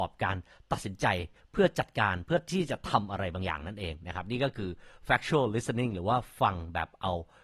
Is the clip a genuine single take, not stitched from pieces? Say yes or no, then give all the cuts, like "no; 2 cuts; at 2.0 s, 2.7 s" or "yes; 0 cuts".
yes; 0 cuts